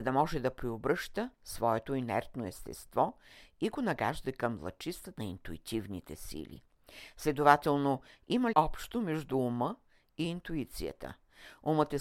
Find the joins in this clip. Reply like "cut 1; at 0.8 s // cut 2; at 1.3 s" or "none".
cut 1; at 1.3 s // cut 2; at 5.2 s // cut 3; at 8.5 s

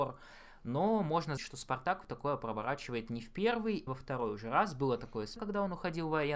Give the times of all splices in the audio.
cut 1; at 1.4 s // cut 2; at 3.9 s // cut 3; at 5.4 s

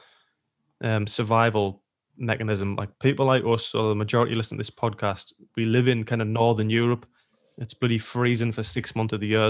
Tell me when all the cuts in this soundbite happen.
none

